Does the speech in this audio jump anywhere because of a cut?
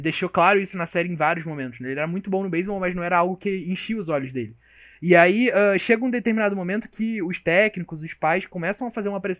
no; 0 cuts

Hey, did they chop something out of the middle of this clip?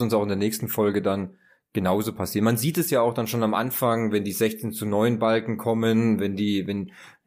no; 0 cuts

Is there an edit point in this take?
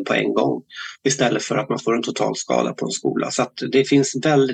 yes; 1 cut; at 1.0 s

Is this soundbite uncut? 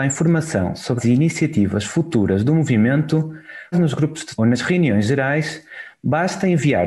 no; 3 cuts; at 1.0 s, 3.7 s, 4.4 s

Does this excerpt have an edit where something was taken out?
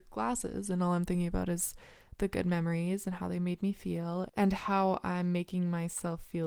yes; 1 cut; at 4.3 s

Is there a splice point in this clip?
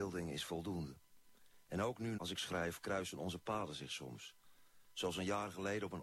yes; 1 cut; at 2.2 s

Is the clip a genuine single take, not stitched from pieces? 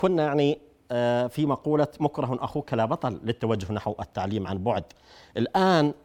yes; 0 cuts

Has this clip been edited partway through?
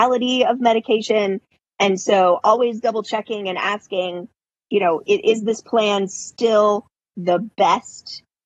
no; 0 cuts

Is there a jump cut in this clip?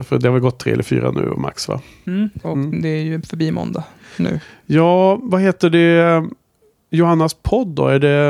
yes; 1 cut; at 2.4 s

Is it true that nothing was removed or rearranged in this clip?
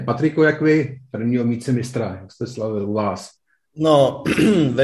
yes; 0 cuts

